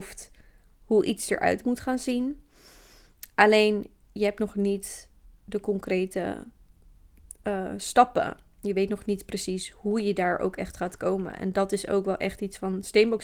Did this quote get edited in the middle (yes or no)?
no